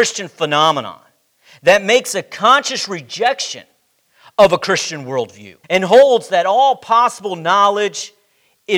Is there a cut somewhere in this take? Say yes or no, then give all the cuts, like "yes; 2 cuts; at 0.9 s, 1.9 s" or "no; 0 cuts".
yes; 1 cut; at 5.6 s